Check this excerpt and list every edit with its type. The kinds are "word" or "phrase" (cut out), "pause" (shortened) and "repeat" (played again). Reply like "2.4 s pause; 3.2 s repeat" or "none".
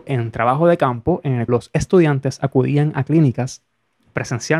1.5 s word